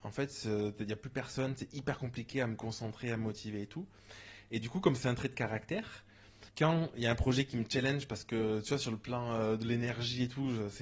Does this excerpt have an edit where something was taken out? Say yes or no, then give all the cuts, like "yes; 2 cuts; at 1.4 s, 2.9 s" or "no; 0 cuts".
yes; 1 cut; at 6.5 s